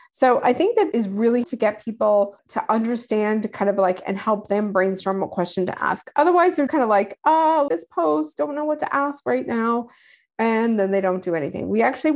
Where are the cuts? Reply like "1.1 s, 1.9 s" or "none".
1.4 s, 6.7 s, 7.7 s